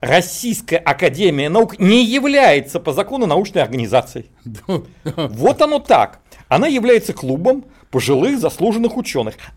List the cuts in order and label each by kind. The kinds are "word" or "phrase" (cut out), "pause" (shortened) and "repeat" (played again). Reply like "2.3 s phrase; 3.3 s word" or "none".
none